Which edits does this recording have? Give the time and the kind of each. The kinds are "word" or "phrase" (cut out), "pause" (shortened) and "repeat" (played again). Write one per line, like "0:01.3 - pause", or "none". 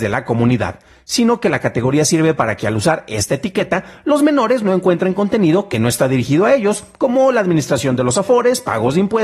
none